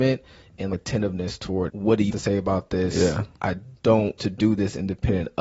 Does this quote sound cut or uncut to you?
cut